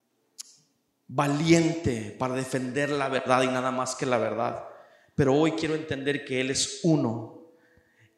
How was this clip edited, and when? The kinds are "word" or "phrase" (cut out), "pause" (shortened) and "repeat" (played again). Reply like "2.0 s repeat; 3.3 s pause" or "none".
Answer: none

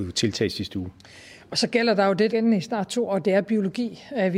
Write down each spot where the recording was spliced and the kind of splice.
2.3 s phrase

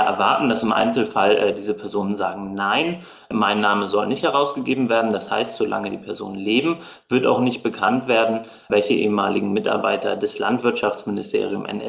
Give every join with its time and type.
none

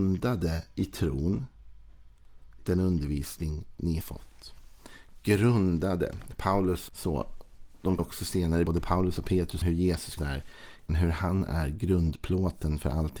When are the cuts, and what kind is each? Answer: 2.6 s word; 4.0 s word; 6.9 s word; 8.0 s word; 8.7 s word; 9.6 s word; 10.2 s word; 10.9 s word

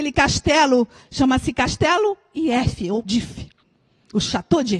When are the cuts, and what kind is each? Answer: 3.0 s word

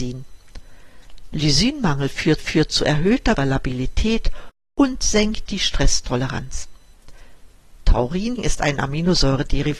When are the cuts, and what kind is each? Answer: 2.4 s repeat; 3.4 s word; 8.4 s word

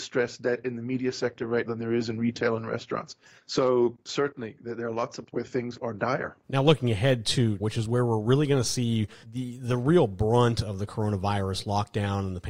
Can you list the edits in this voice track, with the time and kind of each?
1.6 s word; 3.4 s pause; 5.3 s phrase; 5.7 s word; 6.4 s pause; 7.6 s phrase; 9.2 s pause

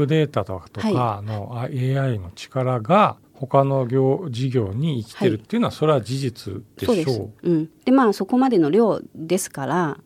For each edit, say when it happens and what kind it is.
3.2 s pause

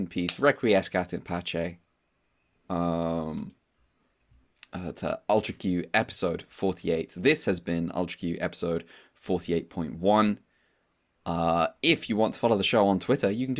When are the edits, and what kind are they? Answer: none

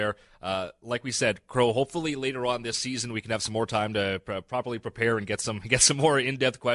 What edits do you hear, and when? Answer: none

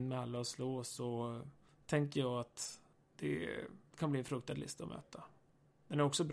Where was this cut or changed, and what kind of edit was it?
3.9 s pause

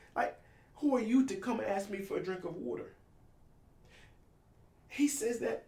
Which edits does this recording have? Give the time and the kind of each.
none

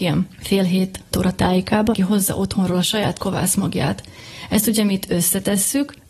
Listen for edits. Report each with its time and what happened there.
1.1 s word; 1.9 s word; 3.2 s word

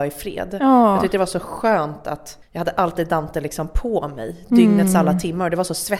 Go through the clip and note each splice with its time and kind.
2.4 s pause

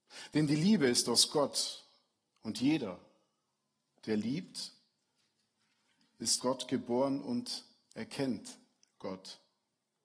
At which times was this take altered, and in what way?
6.4 s word

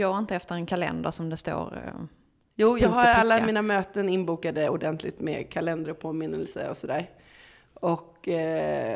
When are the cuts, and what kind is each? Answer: none

